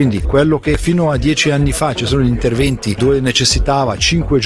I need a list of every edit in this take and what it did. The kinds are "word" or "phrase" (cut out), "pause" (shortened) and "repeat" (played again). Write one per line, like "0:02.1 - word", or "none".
none